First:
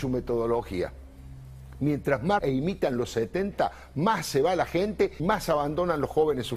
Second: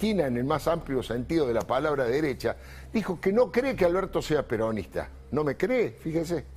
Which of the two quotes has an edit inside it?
first; 2 cuts; at 2.4 s, 5.2 s

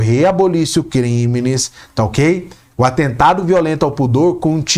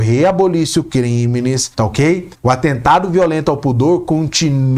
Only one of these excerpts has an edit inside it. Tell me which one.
second; 2 cuts; at 1.7 s, 2.3 s

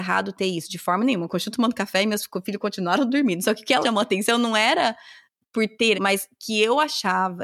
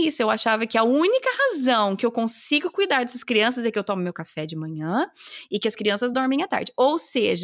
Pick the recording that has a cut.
first; 2 cuts; at 3.8 s, 5.9 s

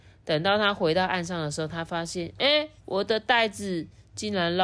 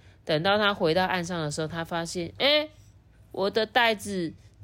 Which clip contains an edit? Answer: first; 1 cut; at 2.8 s

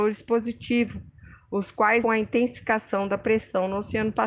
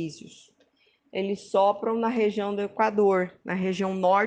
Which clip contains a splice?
first; 1 cut; at 2.0 s

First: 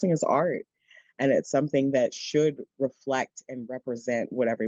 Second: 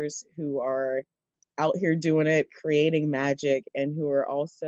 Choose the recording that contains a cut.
first; 1 cut; at 2.7 s

